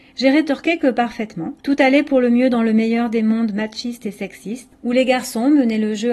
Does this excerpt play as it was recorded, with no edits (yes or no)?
no